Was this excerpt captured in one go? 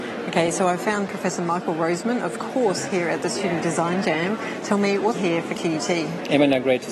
no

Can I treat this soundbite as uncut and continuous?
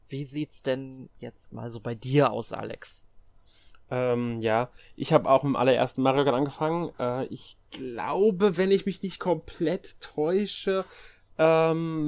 no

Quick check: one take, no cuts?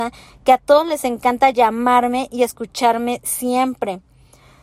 yes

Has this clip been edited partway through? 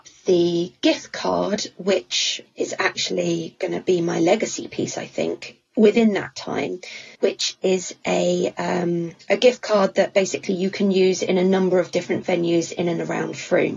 yes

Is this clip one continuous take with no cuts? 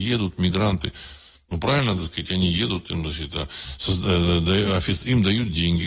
yes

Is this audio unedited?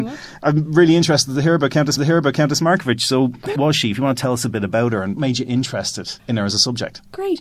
no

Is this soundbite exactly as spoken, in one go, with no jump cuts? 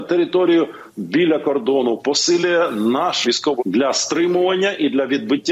no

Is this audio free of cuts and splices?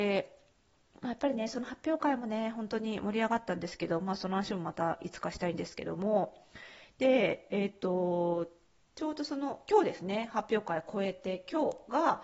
yes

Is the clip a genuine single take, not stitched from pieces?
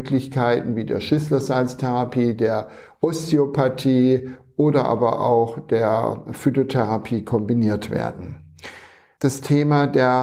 yes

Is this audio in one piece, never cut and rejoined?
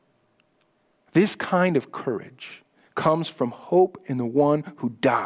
yes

